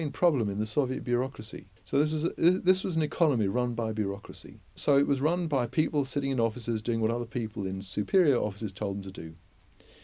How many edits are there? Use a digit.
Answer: 2